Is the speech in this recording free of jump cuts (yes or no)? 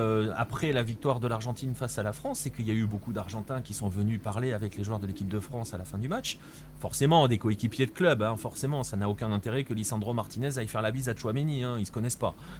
no